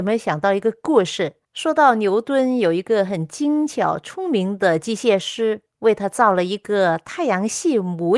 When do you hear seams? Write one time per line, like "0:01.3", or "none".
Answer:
0:01.4